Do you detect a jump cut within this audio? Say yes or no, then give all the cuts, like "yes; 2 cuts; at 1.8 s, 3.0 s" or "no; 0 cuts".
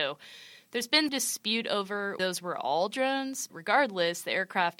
yes; 3 cuts; at 1.1 s, 2.2 s, 3.5 s